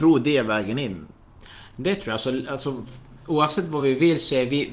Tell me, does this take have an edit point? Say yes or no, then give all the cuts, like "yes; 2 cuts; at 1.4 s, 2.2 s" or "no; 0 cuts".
no; 0 cuts